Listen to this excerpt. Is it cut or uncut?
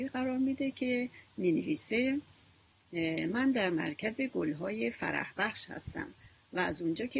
uncut